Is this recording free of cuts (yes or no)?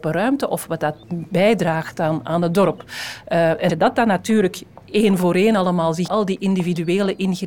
no